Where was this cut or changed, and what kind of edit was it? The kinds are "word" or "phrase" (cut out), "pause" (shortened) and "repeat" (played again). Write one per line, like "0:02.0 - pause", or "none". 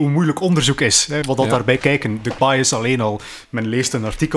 0:01.2 - phrase
0:01.8 - word
0:02.4 - word

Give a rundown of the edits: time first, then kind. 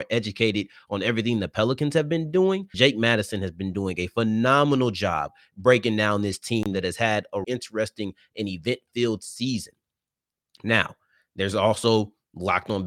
0:02.7 - word
0:07.4 - word

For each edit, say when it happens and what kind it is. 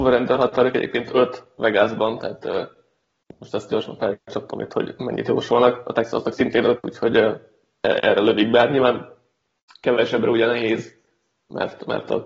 none

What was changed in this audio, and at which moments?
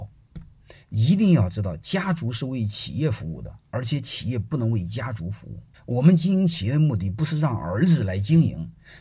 0:05.7 - pause

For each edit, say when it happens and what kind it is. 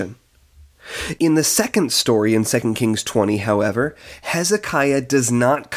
none

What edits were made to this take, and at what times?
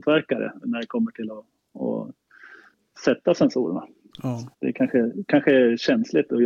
0:04.5 - pause

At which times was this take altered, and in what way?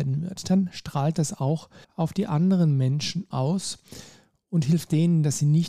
0:01.8 - pause
0:03.3 - phrase

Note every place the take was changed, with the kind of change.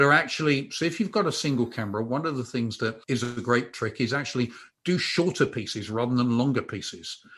0:03.0 - pause

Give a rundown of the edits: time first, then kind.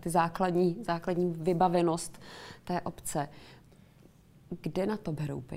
none

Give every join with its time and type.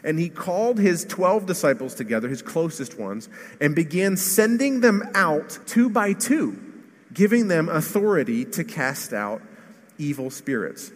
0:05.6 - pause
0:06.8 - pause

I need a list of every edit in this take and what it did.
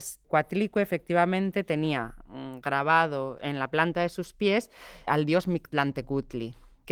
0:05.1 - word

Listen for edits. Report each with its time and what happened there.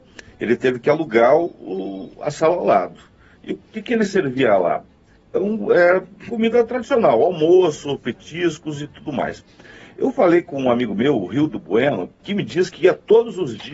none

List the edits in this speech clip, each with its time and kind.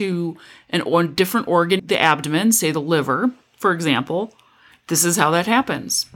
0:01.8 - word

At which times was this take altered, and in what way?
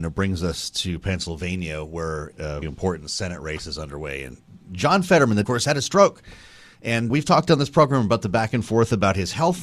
0:02.3 - word
0:02.6 - word
0:04.6 - pause
0:05.4 - phrase
0:07.1 - word

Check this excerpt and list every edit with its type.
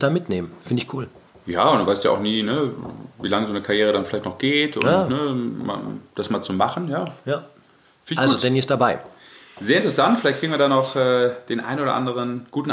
none

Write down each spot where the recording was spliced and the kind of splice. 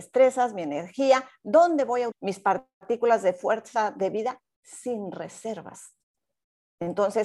0:02.1 - word

